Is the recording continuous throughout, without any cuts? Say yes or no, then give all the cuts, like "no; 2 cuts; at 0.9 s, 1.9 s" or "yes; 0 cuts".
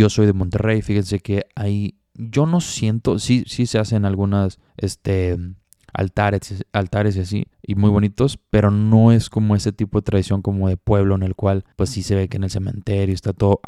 no; 3 cuts; at 4.7 s, 7.5 s, 11.7 s